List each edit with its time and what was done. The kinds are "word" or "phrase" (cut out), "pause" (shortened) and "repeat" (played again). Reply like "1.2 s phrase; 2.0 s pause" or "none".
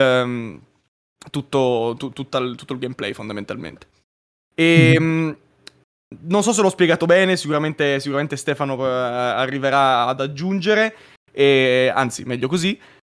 none